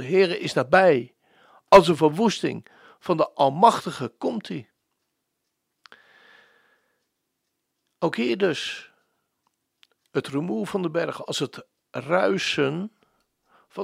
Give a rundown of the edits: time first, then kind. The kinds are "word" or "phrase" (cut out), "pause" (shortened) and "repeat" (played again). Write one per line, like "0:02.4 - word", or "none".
none